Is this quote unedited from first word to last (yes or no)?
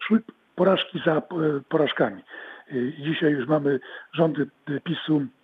yes